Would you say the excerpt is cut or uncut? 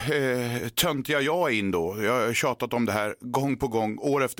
uncut